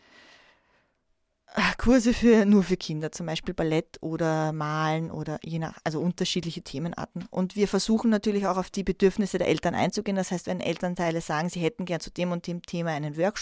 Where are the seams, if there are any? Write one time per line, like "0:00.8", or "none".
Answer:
none